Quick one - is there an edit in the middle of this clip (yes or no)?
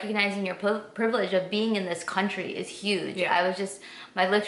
no